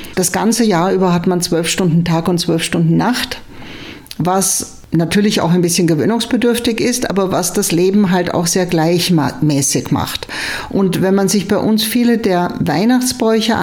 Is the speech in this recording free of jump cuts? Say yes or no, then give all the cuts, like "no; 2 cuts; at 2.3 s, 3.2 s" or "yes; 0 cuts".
yes; 0 cuts